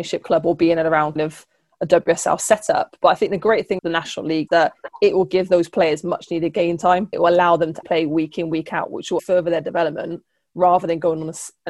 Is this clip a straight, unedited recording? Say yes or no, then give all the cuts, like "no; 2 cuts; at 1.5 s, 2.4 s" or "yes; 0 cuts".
no; 6 cuts; at 1.2 s, 3.8 s, 4.5 s, 7.1 s, 7.8 s, 9.2 s